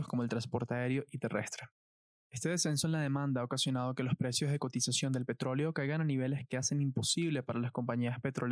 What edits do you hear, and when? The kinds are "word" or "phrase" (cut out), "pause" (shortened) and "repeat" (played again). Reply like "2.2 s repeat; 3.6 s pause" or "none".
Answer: none